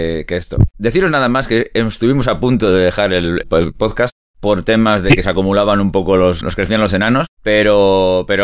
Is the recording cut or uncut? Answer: cut